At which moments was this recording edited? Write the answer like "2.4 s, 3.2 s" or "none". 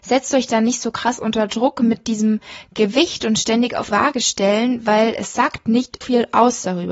3.9 s, 6.0 s